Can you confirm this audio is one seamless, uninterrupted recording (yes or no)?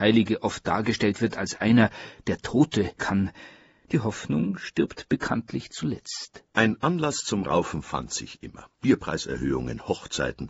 no